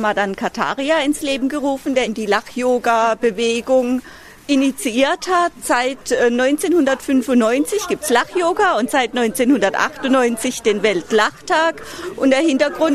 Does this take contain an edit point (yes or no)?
no